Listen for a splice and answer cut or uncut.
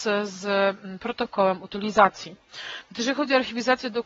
uncut